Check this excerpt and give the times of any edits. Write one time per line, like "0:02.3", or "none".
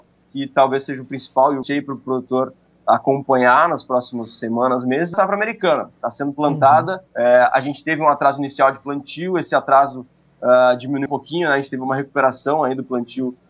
0:01.6
0:05.1
0:07.1
0:11.1

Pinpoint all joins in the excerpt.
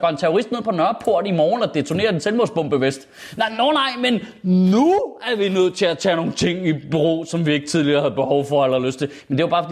none

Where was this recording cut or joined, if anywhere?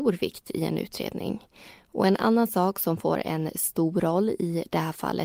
none

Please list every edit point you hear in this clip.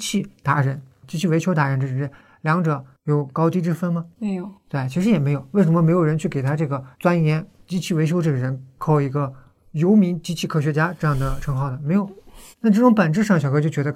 0:04.1
0:06.9
0:12.5

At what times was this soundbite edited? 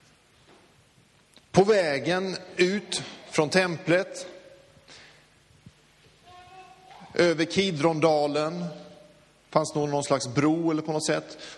none

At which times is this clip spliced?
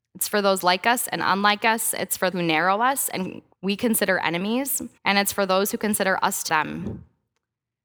0:02.3
0:03.5
0:05.0
0:06.5

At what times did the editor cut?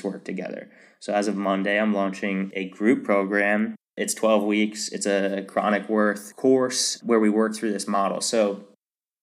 0:03.8

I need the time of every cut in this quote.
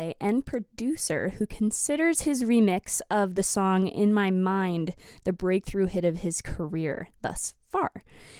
none

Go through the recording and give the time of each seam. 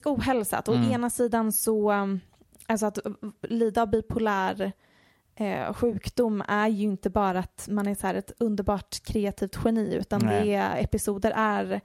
none

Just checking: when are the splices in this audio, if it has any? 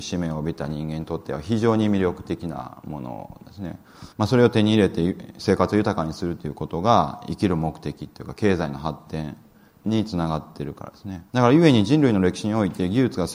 0:04.1
0:11.3

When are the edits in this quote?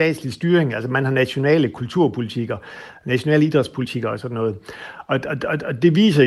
none

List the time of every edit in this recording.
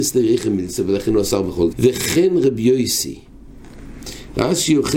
0:01.7

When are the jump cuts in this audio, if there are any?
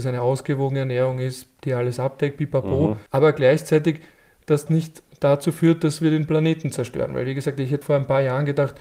0:03.1
0:04.7
0:07.8

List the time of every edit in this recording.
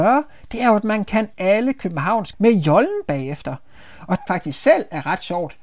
0:01.3
0:02.3
0:04.3

